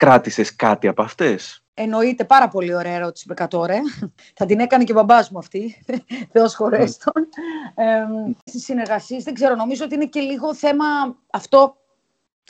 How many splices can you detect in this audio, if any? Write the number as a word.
one